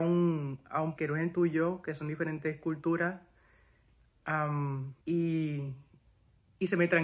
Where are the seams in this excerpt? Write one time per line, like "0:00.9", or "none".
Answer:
0:01.0
0:05.0